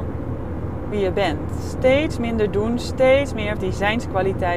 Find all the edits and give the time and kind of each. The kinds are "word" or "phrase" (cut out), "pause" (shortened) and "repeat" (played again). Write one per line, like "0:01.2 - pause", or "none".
0:00.9 - word
0:03.6 - word